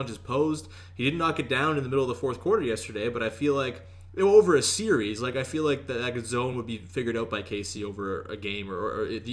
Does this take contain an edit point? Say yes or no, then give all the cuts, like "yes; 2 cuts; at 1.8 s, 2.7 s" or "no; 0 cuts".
no; 0 cuts